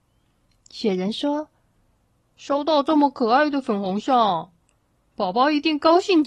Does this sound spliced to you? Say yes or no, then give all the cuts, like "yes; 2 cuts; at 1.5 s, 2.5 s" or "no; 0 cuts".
no; 0 cuts